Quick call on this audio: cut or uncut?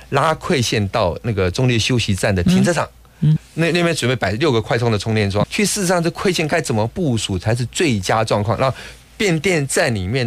cut